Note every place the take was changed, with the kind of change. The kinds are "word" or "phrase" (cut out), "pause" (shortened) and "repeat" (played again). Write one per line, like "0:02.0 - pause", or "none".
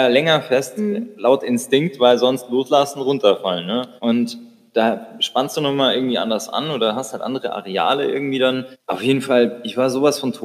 0:04.0 - pause
0:08.7 - pause